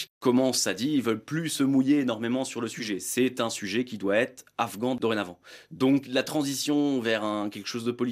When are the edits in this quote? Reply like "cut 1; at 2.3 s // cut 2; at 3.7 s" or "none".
cut 1; at 6.0 s